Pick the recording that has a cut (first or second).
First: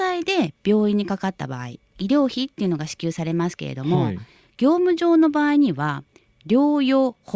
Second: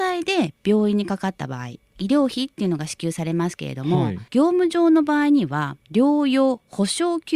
second